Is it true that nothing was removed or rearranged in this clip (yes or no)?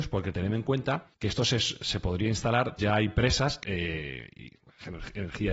no